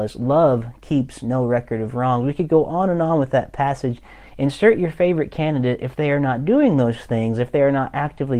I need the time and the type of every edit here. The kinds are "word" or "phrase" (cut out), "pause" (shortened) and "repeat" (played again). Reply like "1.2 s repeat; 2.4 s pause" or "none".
none

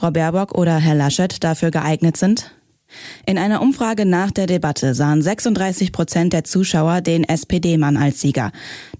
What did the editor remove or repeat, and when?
none

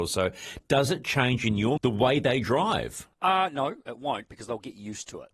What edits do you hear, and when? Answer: 1.8 s word; 3.1 s pause

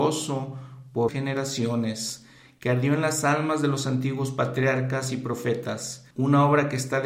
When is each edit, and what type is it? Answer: 1.1 s word; 6.1 s pause

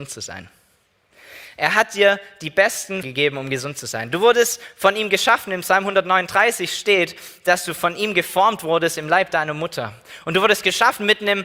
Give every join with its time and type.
3.0 s word

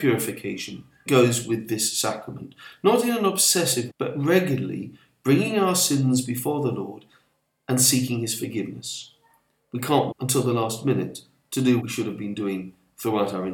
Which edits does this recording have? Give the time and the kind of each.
1.1 s word; 3.9 s word; 10.1 s word; 11.8 s word

